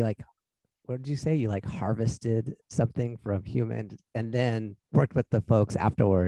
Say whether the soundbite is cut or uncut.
cut